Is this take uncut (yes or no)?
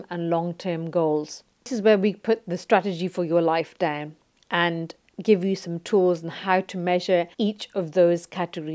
no